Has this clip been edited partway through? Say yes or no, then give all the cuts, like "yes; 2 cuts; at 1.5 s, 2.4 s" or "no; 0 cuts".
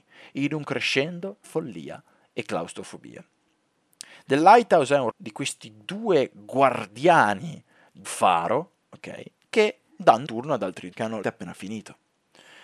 yes; 6 cuts; at 1.4 s, 5.1 s, 8.0 s, 10.3 s, 10.9 s, 11.2 s